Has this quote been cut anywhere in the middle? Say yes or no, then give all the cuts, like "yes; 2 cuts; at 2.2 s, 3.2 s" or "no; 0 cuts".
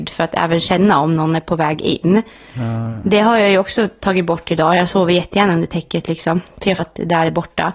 yes; 1 cut; at 6.8 s